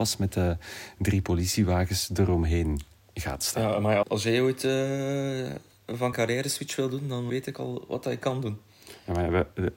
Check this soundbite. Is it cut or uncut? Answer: cut